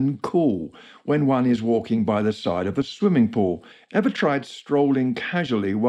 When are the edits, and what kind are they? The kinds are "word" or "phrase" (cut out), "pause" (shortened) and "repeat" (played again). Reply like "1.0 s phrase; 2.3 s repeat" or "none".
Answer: 3.7 s pause